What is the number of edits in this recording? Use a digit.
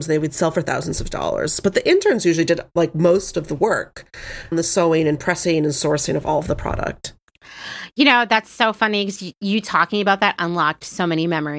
1